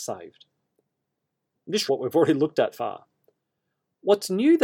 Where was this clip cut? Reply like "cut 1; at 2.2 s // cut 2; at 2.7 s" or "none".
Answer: cut 1; at 1.9 s // cut 2; at 2.7 s